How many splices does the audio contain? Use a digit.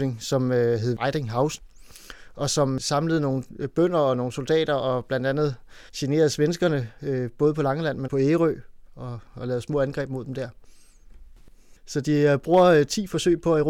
3